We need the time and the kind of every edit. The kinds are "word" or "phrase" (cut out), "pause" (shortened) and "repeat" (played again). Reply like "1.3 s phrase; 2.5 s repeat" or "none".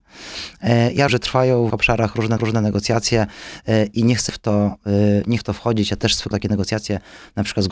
1.1 s word; 1.7 s word; 2.4 s repeat; 4.3 s word; 5.4 s word; 6.3 s word